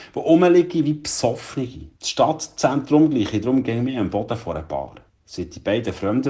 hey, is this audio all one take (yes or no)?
no